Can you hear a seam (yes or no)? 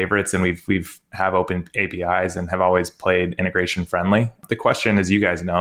no